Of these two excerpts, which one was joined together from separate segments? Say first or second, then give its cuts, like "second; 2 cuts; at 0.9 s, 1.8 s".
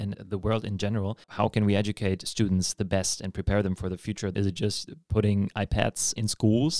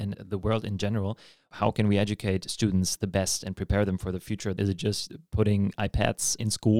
first; 1 cut; at 1.2 s